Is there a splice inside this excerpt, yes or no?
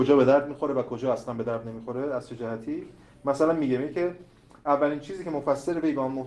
no